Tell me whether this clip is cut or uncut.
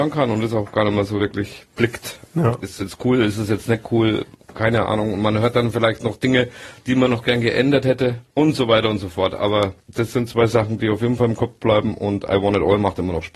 uncut